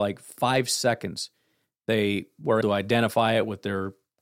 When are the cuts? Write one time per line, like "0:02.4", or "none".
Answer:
0:02.6